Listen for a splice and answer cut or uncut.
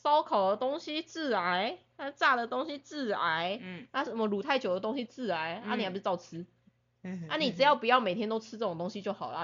uncut